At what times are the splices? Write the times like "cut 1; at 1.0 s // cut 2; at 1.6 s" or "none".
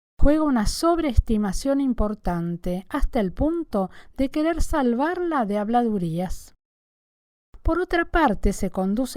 none